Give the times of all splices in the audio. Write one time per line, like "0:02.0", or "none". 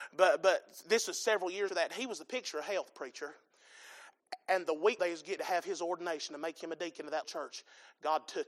0:01.7
0:05.0
0:05.4
0:07.2

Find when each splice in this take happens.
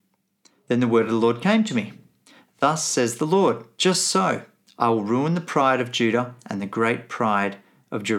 none

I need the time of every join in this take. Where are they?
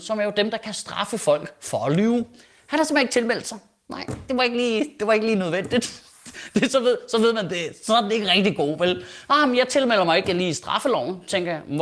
none

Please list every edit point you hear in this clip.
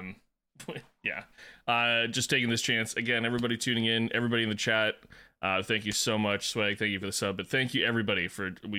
none

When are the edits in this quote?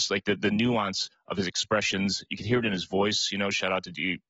none

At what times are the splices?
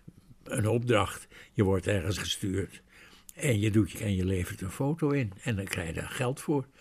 0:02.2
0:04.0

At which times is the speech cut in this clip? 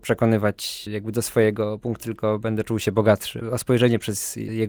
0:02.0

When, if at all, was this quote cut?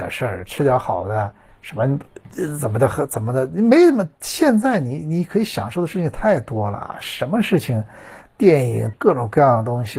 0:01.5
0:08.9

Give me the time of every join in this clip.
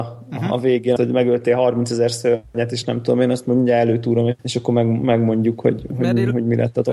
0:01.0
0:04.4
0:05.9

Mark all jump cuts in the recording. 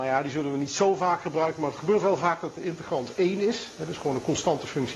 none

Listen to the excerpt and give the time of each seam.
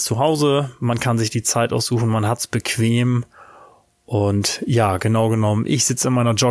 none

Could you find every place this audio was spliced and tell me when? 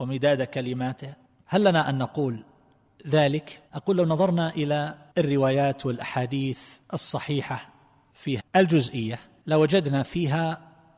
0:03.7
0:05.1
0:06.8
0:08.4

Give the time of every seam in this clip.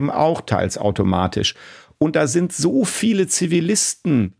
none

